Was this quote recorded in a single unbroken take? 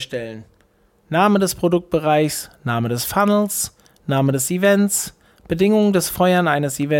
yes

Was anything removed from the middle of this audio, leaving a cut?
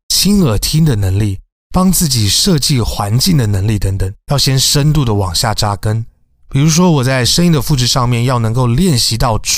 no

